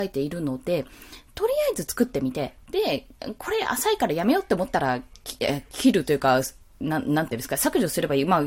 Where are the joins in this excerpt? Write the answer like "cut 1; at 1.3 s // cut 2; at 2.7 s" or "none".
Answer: none